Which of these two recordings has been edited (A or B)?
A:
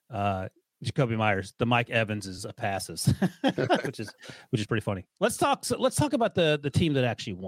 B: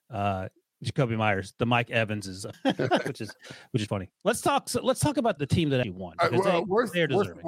B